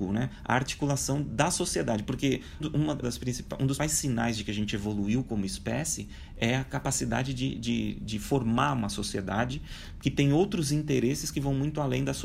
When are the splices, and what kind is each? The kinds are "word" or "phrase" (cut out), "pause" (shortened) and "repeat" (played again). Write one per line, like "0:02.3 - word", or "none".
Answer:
0:02.6 - word
0:03.0 - word
0:03.8 - word